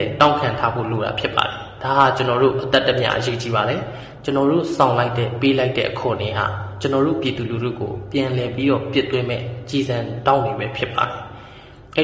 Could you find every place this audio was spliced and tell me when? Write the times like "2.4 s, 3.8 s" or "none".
none